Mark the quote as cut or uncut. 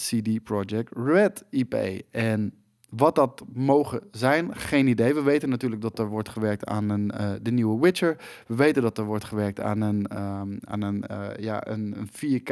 uncut